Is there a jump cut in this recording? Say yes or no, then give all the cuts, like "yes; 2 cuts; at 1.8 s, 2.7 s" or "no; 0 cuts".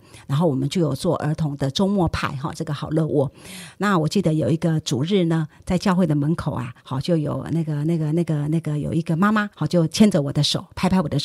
yes; 2 cuts; at 6.8 s, 9.5 s